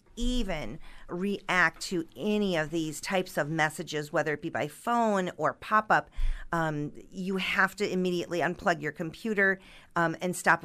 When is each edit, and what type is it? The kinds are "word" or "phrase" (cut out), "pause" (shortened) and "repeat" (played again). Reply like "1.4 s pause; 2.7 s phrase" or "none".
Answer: 1.1 s word